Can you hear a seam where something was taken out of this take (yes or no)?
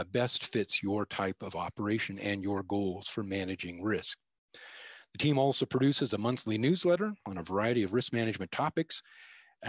no